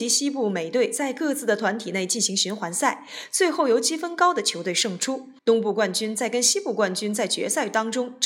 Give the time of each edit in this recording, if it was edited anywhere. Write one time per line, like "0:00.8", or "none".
0:05.4